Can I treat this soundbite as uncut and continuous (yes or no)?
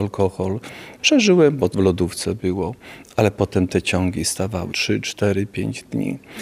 no